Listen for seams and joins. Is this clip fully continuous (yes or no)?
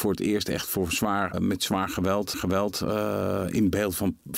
no